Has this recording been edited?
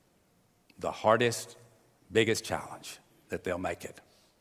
no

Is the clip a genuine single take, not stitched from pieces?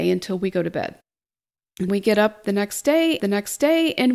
no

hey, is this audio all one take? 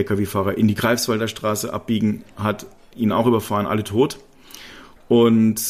yes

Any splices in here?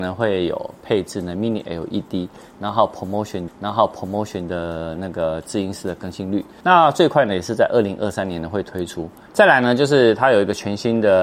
yes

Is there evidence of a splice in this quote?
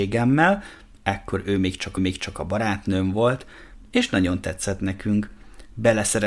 yes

